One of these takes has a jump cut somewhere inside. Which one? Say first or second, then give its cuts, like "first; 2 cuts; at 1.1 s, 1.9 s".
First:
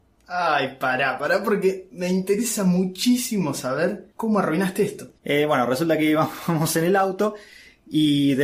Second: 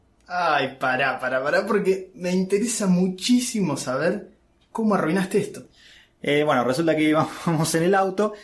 first; 3 cuts; at 1.2 s, 4.1 s, 5.2 s